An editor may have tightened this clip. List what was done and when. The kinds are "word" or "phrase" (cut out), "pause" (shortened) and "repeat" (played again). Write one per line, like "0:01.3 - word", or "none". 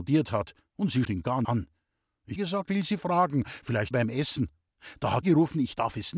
0:01.0 - word
0:01.4 - word
0:02.4 - word
0:02.7 - word
0:03.9 - word
0:05.2 - word